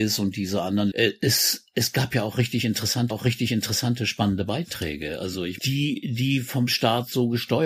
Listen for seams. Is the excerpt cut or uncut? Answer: cut